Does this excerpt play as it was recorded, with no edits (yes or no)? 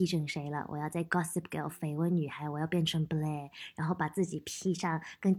yes